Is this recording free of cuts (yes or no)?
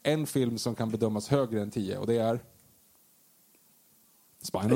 yes